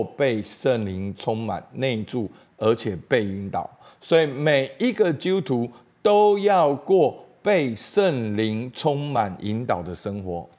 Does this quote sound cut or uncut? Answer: uncut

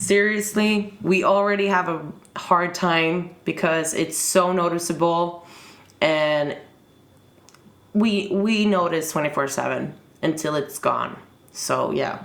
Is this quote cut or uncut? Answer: uncut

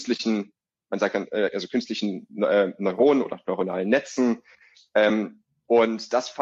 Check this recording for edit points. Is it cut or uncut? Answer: uncut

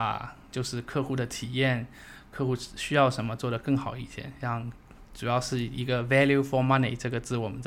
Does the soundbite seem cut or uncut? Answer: uncut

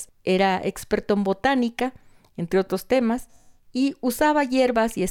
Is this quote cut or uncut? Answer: uncut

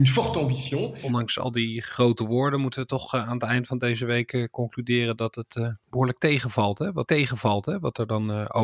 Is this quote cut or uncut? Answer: cut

